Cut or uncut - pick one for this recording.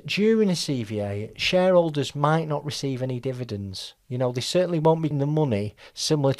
cut